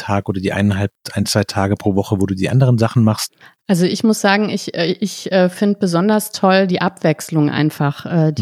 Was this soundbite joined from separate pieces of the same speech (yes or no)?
yes